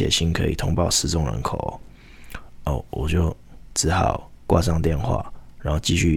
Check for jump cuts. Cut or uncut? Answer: cut